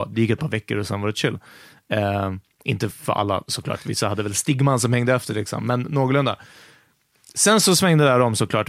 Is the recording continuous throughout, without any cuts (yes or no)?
yes